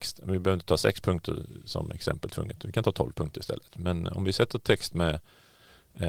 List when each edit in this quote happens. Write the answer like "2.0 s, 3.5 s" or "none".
none